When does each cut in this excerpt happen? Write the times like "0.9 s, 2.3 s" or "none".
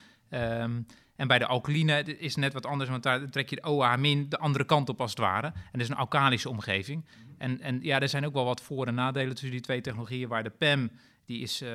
none